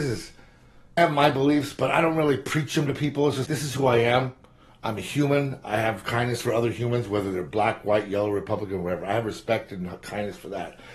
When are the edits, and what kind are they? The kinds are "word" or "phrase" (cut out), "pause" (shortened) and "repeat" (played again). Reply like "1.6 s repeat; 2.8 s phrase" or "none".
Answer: 1.0 s word; 3.5 s word